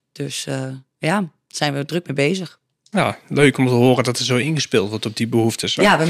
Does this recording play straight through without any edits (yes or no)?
yes